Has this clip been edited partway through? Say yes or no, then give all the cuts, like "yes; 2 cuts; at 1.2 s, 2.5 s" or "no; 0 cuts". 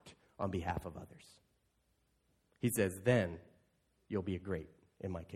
no; 0 cuts